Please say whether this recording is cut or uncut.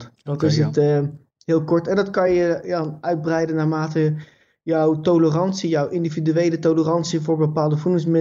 uncut